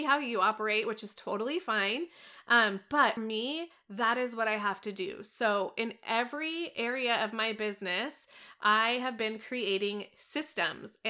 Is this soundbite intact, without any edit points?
no; 1 cut; at 3.2 s

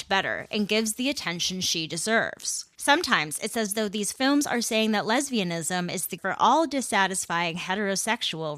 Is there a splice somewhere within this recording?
yes; 2 cuts; at 2.7 s, 6.2 s

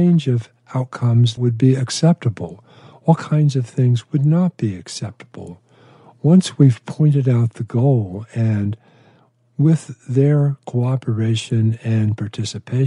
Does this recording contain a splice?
yes; 1 cut; at 1.4 s

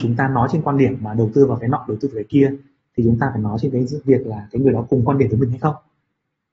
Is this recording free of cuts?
yes; 0 cuts

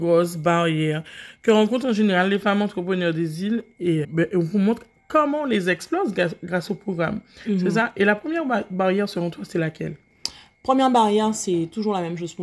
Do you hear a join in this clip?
yes; 1 cut; at 4.0 s

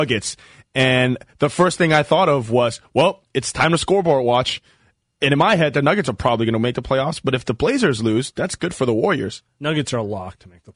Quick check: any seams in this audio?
no; 0 cuts

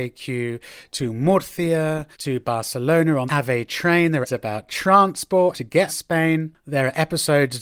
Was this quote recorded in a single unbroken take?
no; 5 cuts; at 2.1 s, 3.3 s, 4.2 s, 5.5 s, 5.9 s

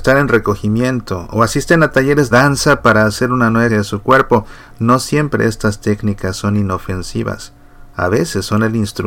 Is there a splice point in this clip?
yes; 2 cuts; at 2.3 s, 3.7 s

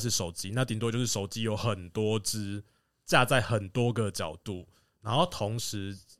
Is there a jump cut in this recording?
no; 0 cuts

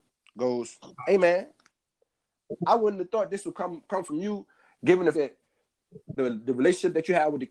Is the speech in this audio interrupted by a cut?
yes; 1 cut; at 5.1 s

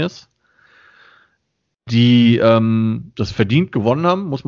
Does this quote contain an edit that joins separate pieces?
no; 0 cuts

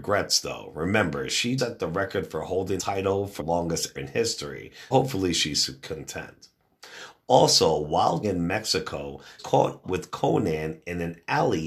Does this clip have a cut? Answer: yes; 8 cuts; at 1.6 s, 2.8 s, 3.4 s, 4.0 s, 4.9 s, 8.2 s, 9.4 s, 9.8 s

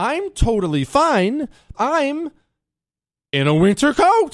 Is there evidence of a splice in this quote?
yes; 1 cut; at 1.7 s

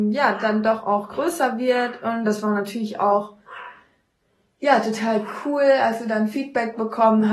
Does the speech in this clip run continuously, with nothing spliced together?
yes; 0 cuts

